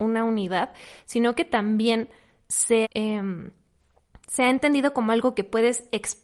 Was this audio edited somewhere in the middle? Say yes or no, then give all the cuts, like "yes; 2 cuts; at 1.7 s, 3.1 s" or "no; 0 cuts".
yes; 1 cut; at 2.8 s